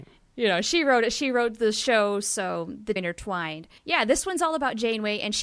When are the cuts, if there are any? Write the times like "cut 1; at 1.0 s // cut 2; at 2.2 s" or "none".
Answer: cut 1; at 3.0 s // cut 2; at 3.8 s